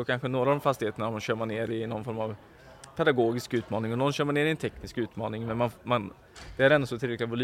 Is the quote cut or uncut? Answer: uncut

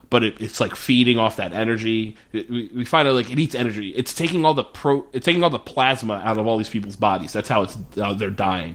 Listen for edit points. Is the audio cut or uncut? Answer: uncut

